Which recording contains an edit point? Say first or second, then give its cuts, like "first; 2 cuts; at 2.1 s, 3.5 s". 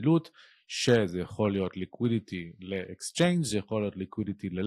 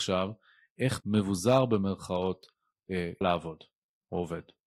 second; 2 cuts; at 1.0 s, 3.2 s